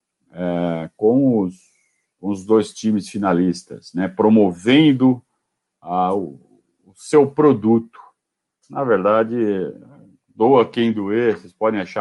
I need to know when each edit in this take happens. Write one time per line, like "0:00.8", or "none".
none

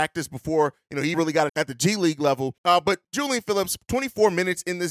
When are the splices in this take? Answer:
0:01.1
0:01.5
0:02.6
0:03.0

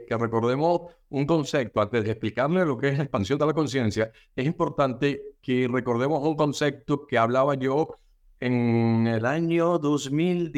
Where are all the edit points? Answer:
none

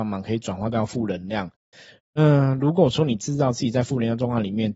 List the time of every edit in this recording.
none

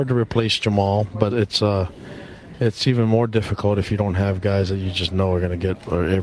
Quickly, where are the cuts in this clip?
0:01.3

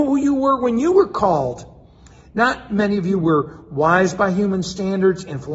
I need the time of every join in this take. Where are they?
none

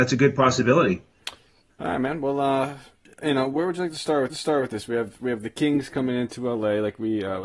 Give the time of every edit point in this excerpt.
0:04.3

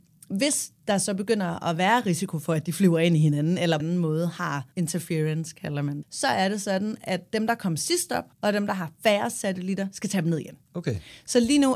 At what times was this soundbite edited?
0:03.8
0:04.7
0:06.0
0:08.3
0:10.6

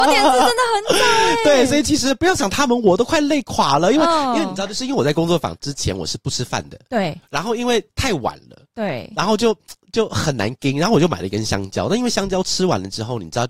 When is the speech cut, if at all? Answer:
0:07.9

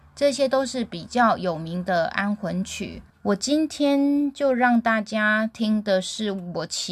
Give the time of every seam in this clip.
0:03.1

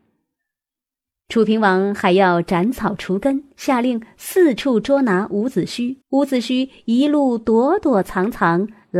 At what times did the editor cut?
0:03.5
0:06.0

